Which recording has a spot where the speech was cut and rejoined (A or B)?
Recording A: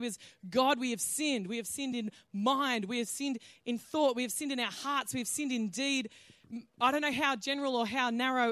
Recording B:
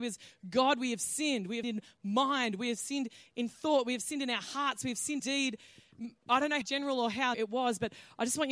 B